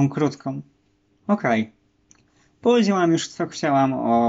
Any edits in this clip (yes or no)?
no